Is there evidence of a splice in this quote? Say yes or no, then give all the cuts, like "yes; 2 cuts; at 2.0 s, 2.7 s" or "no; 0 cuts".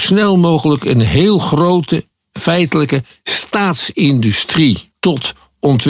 no; 0 cuts